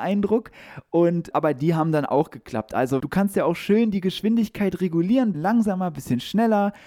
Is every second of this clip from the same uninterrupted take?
no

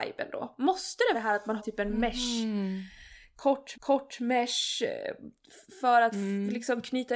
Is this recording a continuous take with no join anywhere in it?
no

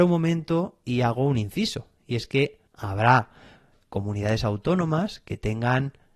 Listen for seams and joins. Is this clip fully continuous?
no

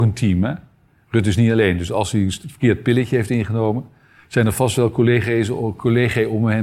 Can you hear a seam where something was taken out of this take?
no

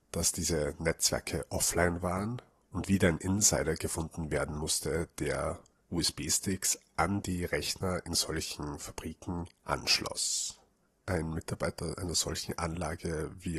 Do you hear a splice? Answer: no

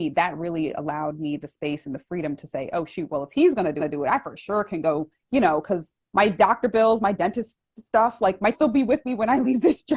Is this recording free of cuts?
no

